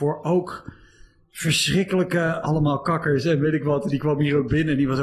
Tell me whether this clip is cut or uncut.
cut